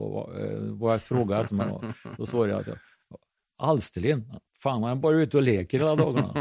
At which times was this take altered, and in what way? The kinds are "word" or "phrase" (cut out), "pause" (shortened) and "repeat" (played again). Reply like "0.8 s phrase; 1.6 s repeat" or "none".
none